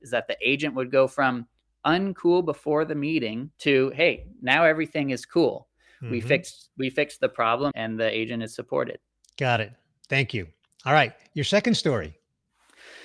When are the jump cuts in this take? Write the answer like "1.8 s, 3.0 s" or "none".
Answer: 3.5 s, 7.7 s